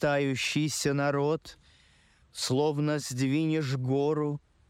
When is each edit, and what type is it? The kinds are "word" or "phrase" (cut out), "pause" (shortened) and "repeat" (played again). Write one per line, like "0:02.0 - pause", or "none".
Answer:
none